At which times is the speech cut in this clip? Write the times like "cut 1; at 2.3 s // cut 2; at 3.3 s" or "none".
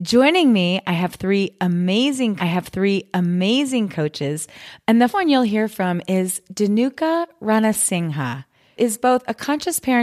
cut 1; at 2.4 s // cut 2; at 5.1 s // cut 3; at 8.8 s